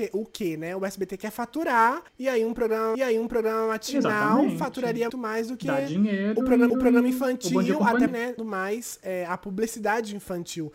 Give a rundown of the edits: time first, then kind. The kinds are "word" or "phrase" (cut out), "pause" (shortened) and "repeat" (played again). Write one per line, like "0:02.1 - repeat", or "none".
0:02.1 - pause
0:02.9 - repeat
0:05.1 - word
0:06.7 - repeat
0:08.1 - word
0:08.4 - phrase